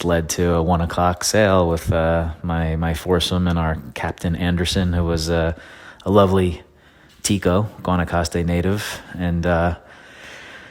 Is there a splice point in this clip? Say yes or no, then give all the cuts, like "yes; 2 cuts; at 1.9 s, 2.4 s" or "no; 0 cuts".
no; 0 cuts